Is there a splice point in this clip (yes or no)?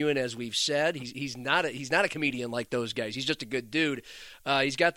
no